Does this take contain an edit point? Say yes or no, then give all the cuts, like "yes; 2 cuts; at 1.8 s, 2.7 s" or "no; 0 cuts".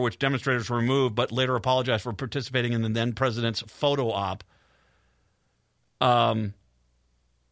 no; 0 cuts